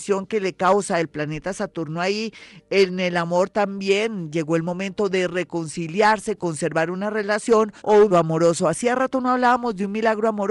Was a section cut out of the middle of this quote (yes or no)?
yes